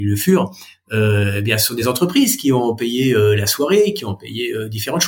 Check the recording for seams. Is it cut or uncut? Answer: uncut